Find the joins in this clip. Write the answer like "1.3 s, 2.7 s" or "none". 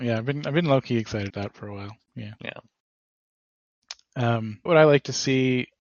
1.3 s, 4.7 s